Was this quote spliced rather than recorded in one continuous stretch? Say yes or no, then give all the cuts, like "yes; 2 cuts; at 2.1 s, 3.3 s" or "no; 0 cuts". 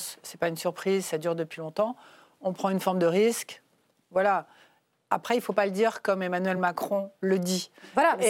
no; 0 cuts